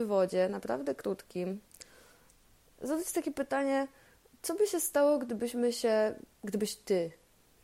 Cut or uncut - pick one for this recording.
cut